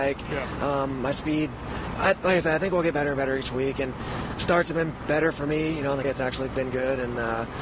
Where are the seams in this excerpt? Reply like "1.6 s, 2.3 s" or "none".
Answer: 6.0 s, 6.5 s